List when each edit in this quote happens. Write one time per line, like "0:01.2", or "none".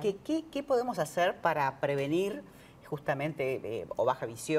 none

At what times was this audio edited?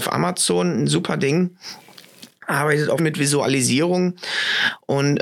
0:03.0

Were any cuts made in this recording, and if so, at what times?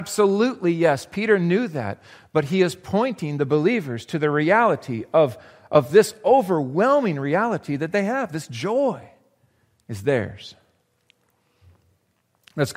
none

